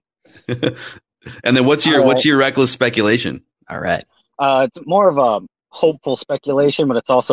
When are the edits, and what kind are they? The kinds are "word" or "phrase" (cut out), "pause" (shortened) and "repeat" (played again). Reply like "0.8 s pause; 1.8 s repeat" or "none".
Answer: none